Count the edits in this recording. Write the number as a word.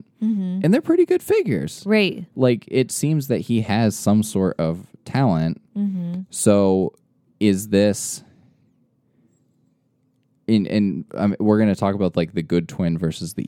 zero